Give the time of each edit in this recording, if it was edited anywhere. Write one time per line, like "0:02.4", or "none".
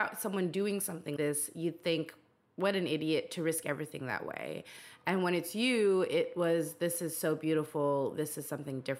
0:01.2